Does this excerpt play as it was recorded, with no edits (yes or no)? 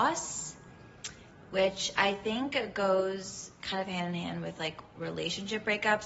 yes